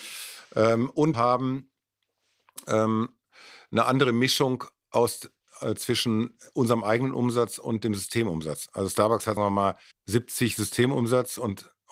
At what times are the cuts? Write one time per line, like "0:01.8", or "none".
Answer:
0:01.1
0:09.4
0:09.9

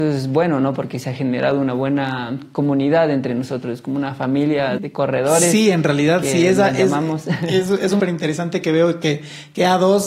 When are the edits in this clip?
0:04.8
0:08.0

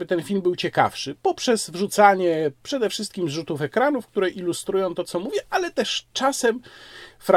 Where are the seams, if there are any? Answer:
none

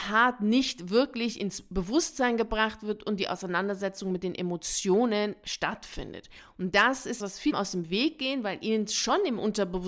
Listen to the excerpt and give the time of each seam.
0:07.2
0:07.5

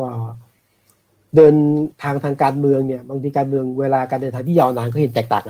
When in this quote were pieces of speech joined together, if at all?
0:01.9

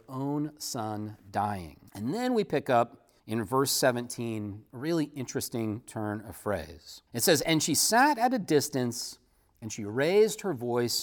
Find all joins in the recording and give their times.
0:01.9
0:03.2
0:07.1

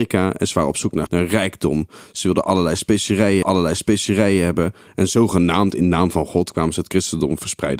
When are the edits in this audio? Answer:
0:01.1
0:03.4

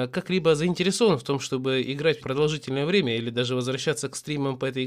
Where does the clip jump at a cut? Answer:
0:02.2

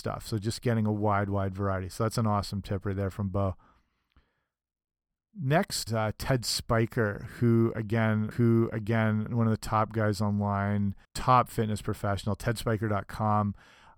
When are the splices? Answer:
0:05.9
0:08.3
0:11.0

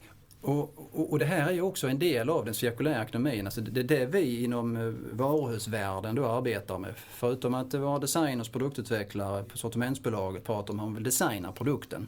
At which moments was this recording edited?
none

